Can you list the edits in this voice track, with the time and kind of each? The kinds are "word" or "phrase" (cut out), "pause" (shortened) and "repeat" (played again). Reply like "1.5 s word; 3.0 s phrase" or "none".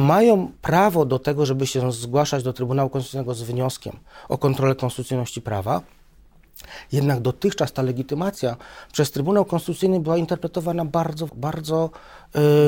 11.3 s word